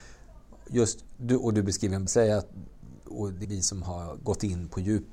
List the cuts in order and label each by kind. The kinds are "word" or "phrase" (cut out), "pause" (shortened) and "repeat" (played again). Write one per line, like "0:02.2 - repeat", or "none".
0:02.1 - word
0:03.4 - word